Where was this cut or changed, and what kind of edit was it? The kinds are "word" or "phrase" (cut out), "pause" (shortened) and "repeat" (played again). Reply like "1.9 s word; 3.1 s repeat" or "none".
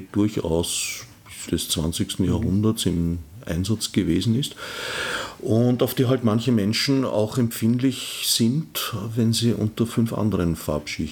1.5 s word